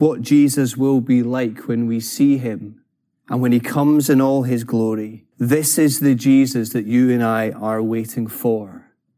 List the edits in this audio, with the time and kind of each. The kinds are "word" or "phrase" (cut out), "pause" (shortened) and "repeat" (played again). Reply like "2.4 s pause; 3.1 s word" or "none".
2.9 s pause; 5.3 s pause